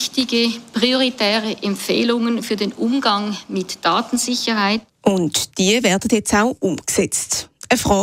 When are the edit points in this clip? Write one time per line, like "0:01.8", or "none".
0:04.9